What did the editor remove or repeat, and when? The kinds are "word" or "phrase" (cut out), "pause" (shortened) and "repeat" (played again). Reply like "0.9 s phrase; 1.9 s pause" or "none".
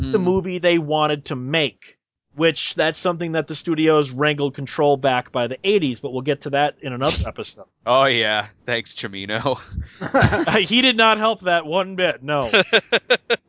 none